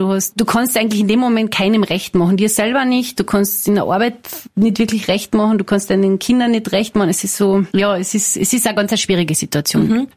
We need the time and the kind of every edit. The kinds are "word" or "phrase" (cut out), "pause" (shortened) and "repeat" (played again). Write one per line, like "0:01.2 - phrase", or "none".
none